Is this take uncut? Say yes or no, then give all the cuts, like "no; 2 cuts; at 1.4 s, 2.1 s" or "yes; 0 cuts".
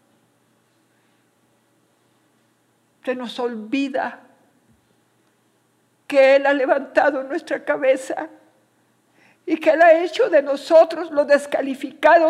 yes; 0 cuts